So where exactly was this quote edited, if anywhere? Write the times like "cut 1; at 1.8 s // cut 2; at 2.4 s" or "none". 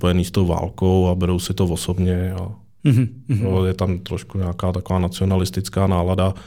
none